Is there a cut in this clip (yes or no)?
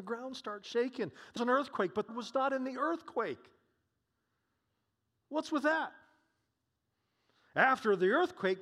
yes